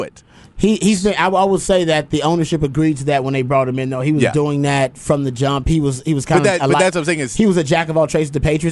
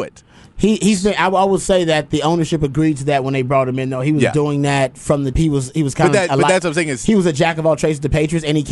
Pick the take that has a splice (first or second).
second